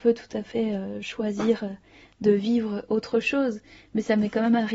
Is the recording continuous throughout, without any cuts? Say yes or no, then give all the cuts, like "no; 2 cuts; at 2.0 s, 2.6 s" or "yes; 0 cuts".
yes; 0 cuts